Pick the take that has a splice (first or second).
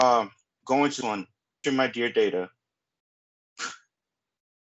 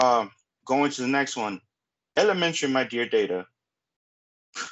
first